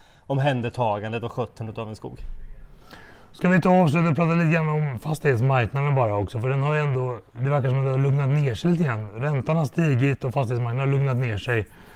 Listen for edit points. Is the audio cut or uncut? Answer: uncut